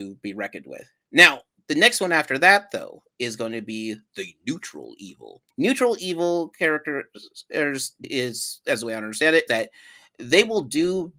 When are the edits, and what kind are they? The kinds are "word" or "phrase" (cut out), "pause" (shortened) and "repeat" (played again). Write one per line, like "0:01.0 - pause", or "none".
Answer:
0:05.5 - pause
0:08.0 - word
0:09.5 - word